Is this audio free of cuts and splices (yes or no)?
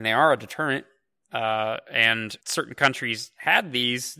no